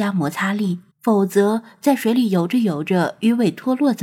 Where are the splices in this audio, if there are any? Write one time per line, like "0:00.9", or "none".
0:00.9